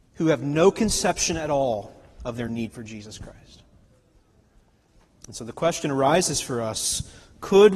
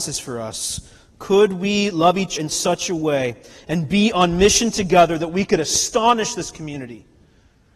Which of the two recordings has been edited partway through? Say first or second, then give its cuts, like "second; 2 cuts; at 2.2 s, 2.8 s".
second; 1 cut; at 2.4 s